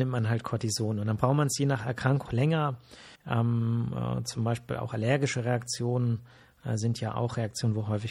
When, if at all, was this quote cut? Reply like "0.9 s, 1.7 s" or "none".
2.2 s, 3.2 s